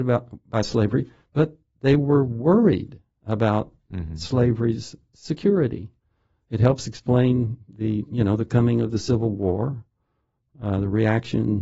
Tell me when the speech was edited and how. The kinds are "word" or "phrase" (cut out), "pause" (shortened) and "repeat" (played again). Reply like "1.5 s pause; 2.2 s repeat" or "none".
none

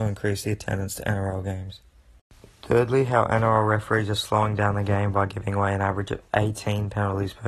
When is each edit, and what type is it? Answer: 2.5 s pause

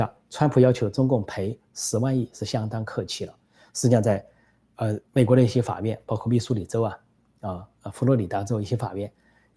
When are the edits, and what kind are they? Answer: 5.1 s pause

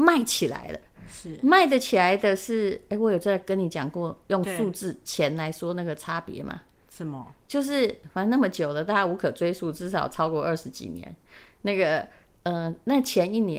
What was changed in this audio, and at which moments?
none

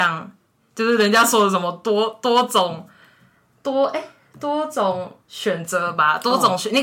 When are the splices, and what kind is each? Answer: 5.2 s pause

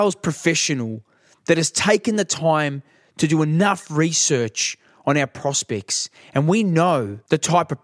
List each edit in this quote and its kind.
none

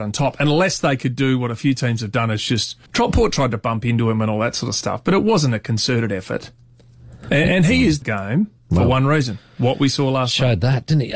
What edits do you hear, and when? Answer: 2.9 s pause; 8.0 s phrase

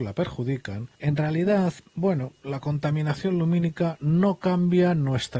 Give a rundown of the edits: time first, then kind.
0.9 s pause; 1.9 s pause

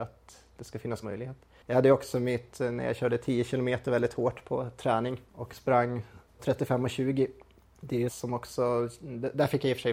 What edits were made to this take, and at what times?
1.0 s word; 6.4 s word; 8.1 s phrase

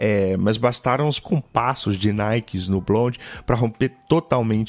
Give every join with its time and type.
1.2 s word

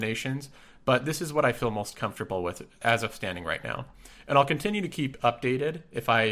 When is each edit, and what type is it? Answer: none

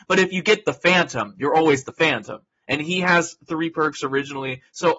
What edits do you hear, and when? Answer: none

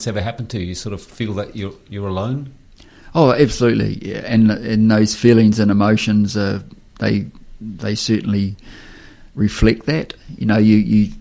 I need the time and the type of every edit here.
9.3 s pause

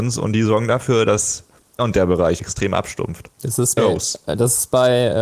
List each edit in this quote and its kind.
1.8 s word; 2.4 s phrase; 3.8 s word

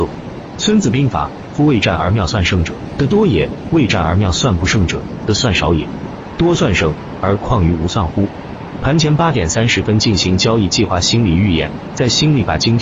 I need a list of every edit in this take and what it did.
7.2 s phrase

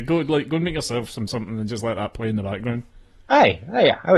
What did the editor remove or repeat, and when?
1.3 s phrase

